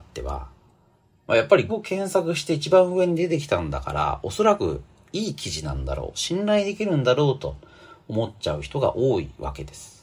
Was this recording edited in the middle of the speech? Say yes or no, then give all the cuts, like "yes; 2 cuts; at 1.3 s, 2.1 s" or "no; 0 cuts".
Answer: yes; 1 cut; at 1.7 s